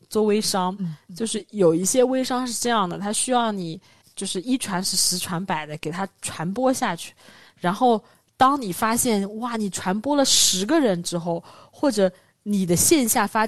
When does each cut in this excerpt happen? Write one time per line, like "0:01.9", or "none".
0:04.0